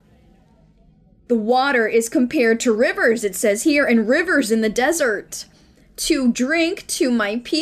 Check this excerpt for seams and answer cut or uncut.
cut